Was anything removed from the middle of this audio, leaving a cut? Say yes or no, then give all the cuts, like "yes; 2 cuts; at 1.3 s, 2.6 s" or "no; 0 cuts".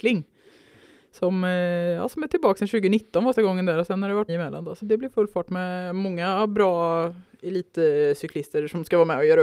yes; 3 cuts; at 3.3 s, 4.3 s, 4.8 s